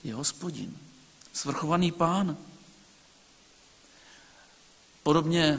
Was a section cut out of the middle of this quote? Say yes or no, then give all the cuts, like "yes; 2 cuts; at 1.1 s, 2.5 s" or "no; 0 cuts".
no; 0 cuts